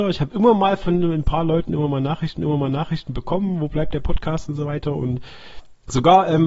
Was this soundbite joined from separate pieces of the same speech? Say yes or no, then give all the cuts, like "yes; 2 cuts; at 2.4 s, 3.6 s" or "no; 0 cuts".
yes; 1 cut; at 2.4 s